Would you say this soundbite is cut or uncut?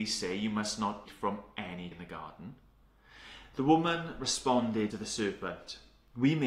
cut